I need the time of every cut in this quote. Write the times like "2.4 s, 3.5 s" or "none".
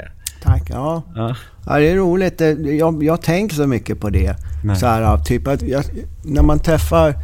3.5 s, 5.6 s